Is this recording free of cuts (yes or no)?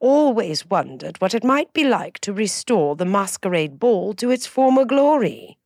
yes